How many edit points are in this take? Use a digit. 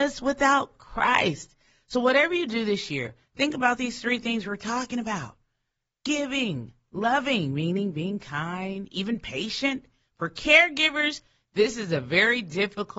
0